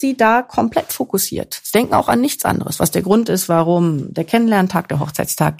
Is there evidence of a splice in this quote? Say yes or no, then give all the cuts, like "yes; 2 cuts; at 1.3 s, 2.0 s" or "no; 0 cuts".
no; 0 cuts